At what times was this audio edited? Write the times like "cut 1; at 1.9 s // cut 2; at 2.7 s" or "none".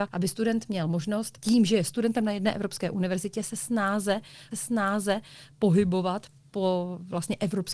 cut 1; at 4.5 s